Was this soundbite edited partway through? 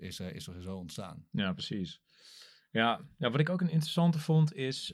no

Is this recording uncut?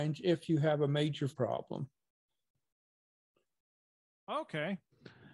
no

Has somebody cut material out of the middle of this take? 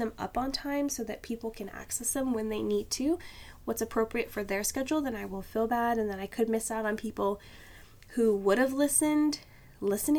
no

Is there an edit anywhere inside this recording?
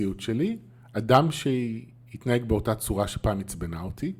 no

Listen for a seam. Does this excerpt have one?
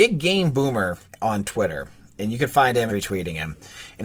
yes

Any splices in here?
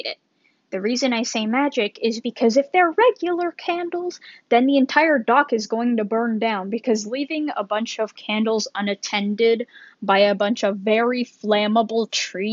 no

